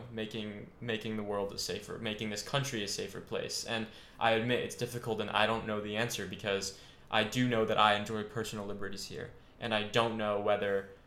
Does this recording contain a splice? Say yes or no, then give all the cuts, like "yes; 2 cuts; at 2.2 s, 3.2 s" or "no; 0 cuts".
no; 0 cuts